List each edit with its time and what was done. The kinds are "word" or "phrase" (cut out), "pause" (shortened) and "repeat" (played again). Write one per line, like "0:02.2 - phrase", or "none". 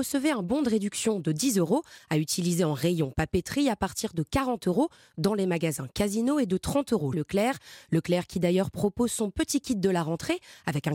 0:07.1 - word